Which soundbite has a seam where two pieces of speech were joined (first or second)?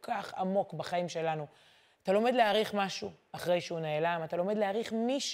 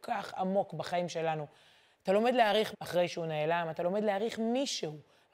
second